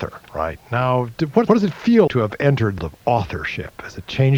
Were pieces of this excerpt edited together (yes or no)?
yes